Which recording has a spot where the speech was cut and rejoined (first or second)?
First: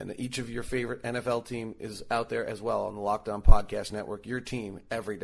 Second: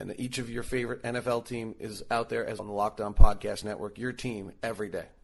second